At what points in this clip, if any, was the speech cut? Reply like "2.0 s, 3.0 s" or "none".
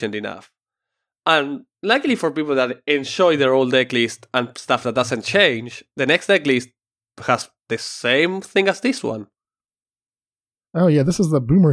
1.7 s